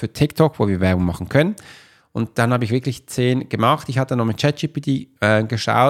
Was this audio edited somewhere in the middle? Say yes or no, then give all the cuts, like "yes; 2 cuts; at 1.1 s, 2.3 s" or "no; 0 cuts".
no; 0 cuts